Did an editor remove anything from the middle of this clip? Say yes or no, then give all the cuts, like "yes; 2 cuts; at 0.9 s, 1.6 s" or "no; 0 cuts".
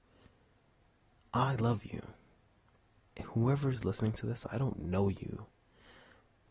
no; 0 cuts